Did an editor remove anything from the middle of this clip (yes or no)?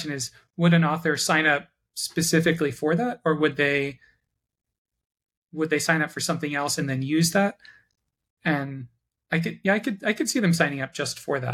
no